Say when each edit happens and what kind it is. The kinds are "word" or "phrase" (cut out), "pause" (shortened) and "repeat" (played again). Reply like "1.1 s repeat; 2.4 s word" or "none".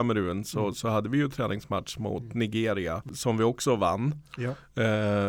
none